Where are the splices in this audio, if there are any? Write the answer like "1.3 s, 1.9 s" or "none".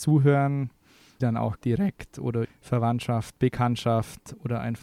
1.2 s, 1.6 s, 2.4 s